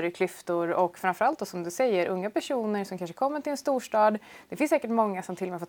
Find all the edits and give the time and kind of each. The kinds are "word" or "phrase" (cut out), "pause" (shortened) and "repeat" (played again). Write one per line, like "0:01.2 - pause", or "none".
none

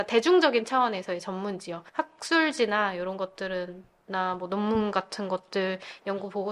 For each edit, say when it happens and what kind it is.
0:01.9 - pause

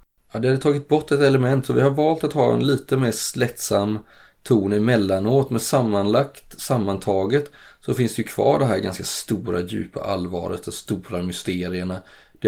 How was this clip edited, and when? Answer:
none

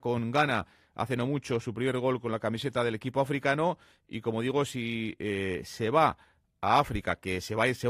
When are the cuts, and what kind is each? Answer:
none

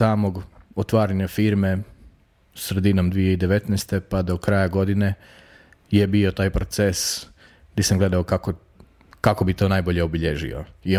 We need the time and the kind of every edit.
none

